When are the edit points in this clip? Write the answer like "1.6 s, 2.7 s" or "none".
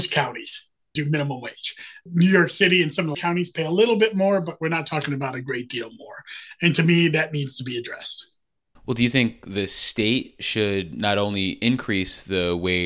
2.1 s, 3.1 s